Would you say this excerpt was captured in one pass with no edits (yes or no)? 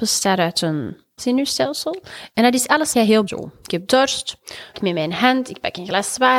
no